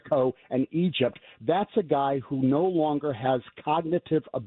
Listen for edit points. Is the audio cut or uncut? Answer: uncut